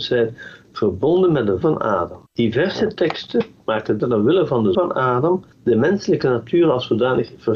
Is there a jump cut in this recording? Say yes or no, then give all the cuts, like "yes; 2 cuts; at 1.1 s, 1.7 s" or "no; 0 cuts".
yes; 5 cuts; at 1.6 s, 2.3 s, 4.0 s, 4.7 s, 5.5 s